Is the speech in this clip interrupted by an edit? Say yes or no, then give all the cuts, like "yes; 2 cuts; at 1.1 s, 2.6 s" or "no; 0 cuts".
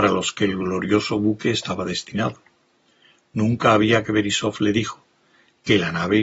yes; 1 cut; at 4.0 s